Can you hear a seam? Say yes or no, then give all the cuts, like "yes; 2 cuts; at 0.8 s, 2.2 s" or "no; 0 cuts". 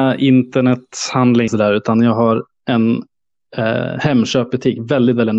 yes; 1 cut; at 1.5 s